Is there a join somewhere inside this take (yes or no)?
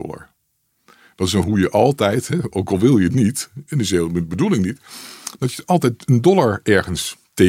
yes